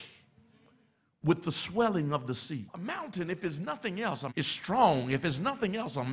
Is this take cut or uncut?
cut